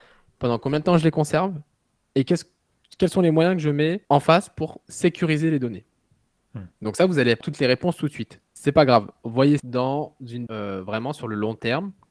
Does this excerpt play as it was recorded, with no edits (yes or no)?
no